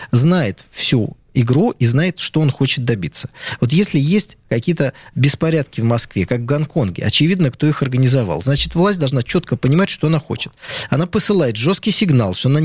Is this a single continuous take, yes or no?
yes